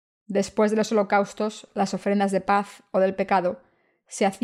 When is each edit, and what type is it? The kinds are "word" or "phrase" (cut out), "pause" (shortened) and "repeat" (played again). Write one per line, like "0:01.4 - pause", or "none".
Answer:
none